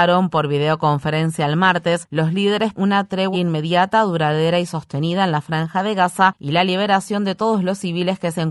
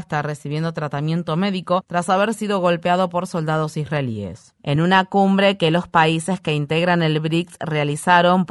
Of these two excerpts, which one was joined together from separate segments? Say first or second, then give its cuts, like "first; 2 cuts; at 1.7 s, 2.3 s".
first; 2 cuts; at 2.8 s, 3.3 s